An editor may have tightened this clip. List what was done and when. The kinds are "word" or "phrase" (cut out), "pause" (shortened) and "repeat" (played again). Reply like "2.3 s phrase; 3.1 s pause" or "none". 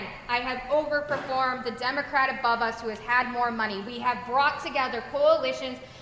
none